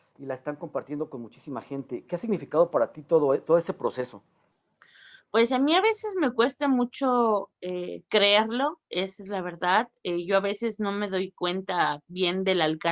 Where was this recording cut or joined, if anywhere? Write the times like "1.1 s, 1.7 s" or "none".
4.5 s, 8.8 s